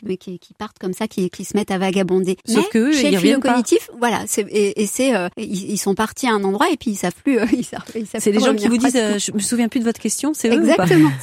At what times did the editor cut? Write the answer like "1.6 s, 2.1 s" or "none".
2.4 s, 5.3 s